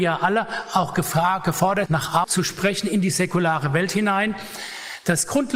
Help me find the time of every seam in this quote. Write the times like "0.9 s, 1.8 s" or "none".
1.9 s, 2.2 s